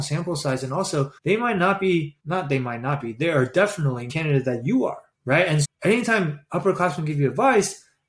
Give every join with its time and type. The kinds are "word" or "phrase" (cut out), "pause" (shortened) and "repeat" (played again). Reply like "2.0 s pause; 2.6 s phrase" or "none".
1.2 s pause; 2.2 s pause; 4.1 s phrase; 5.1 s pause; 5.6 s word